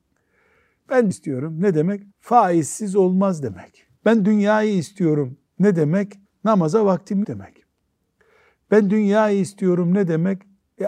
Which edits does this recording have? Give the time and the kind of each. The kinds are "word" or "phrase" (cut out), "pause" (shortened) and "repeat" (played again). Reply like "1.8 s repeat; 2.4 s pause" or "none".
1.1 s word; 2.1 s pause; 4.0 s pause; 6.2 s pause; 7.2 s word